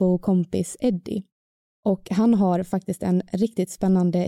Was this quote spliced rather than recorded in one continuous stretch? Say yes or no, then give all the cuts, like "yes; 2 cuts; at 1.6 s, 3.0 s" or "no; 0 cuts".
no; 0 cuts